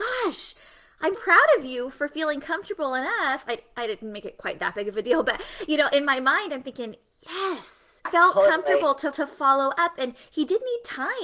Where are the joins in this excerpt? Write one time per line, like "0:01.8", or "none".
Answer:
0:01.1
0:08.0
0:09.1